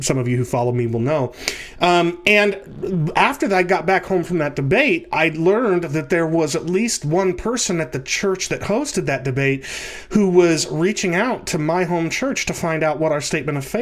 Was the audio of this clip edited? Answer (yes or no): no